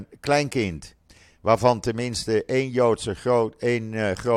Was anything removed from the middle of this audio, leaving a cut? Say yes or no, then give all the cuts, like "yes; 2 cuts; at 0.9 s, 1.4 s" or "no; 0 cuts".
no; 0 cuts